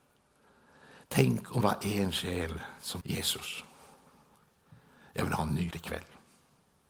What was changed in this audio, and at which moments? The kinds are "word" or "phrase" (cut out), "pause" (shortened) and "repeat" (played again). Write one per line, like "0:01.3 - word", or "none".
0:01.6 - word
0:03.0 - word
0:05.7 - word